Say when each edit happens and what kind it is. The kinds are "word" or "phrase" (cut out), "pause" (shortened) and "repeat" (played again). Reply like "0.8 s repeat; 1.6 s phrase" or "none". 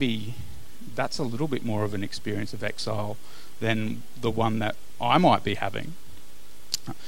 none